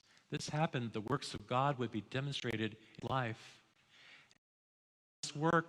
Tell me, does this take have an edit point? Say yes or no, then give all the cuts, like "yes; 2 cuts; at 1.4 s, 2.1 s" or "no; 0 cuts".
yes; 1 cut; at 3.0 s